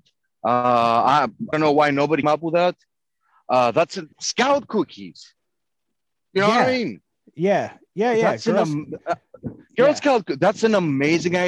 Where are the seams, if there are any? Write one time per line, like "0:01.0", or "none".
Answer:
0:01.5
0:02.2
0:04.1